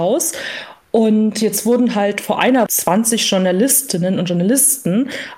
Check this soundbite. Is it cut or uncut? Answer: cut